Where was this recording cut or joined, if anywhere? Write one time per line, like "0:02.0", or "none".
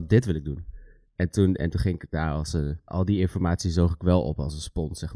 0:02.9